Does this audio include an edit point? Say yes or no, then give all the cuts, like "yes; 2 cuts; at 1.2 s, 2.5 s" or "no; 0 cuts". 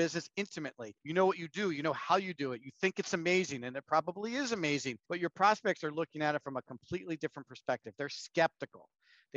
yes; 2 cuts; at 1.0 s, 5.0 s